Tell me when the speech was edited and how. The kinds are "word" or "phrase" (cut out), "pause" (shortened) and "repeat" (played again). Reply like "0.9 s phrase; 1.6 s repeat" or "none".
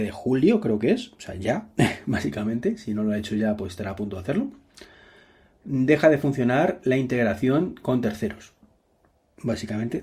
none